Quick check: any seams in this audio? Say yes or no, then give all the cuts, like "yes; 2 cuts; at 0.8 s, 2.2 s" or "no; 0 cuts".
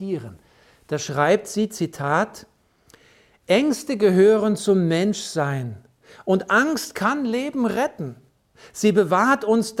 no; 0 cuts